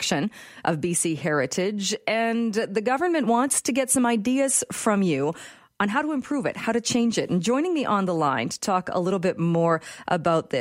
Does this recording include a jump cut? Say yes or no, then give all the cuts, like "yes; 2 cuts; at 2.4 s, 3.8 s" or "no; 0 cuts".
no; 0 cuts